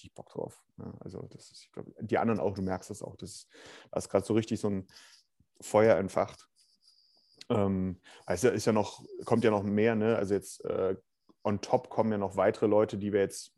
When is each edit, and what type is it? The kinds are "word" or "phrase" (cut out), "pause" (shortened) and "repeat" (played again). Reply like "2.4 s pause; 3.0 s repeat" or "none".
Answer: none